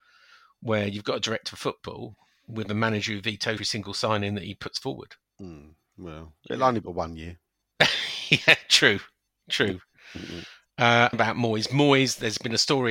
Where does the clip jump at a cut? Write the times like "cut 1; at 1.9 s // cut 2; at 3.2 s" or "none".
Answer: cut 1; at 3.6 s // cut 2; at 6.8 s // cut 3; at 11.1 s

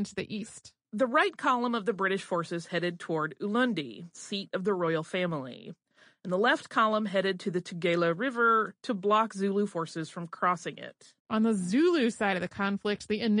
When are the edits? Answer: cut 1; at 11.2 s

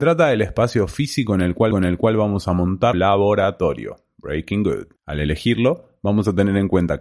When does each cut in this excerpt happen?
cut 1; at 1.7 s // cut 2; at 2.9 s // cut 3; at 5.0 s

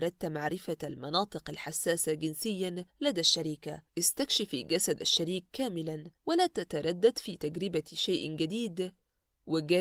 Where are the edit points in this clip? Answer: cut 1; at 2.9 s // cut 2; at 3.9 s // cut 3; at 6.2 s

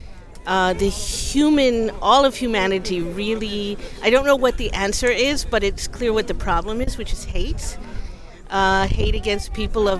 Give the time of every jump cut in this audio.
none

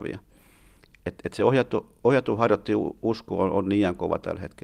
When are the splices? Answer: none

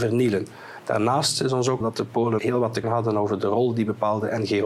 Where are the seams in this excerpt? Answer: cut 1; at 1.8 s // cut 2; at 2.4 s // cut 3; at 2.8 s

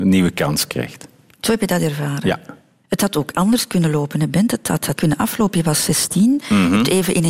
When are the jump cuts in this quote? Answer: cut 1; at 4.9 s

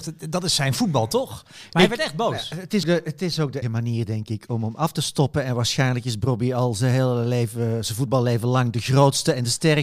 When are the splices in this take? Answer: cut 1; at 2.8 s // cut 2; at 3.6 s

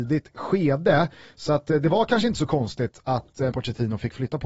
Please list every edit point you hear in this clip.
cut 1; at 3.5 s

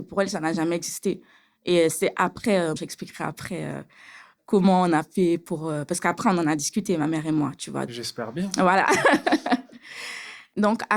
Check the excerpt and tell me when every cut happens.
cut 1; at 2.8 s // cut 2; at 7.9 s

